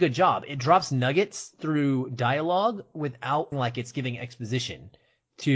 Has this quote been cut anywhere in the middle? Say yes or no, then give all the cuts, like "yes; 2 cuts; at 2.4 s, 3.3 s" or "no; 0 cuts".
yes; 1 cut; at 3.5 s